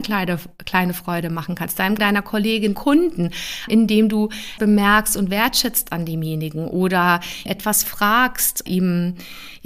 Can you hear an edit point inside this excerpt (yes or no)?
yes